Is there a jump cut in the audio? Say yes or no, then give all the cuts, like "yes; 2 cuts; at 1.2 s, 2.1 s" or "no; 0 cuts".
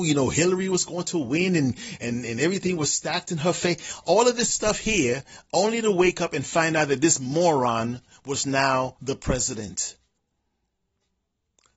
no; 0 cuts